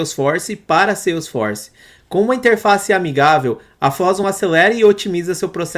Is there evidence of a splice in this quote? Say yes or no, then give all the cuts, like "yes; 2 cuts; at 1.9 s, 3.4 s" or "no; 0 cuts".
no; 0 cuts